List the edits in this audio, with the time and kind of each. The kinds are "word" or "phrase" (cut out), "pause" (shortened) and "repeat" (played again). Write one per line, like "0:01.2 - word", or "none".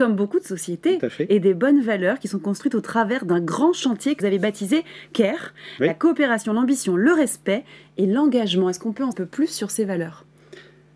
0:04.2 - word
0:09.1 - phrase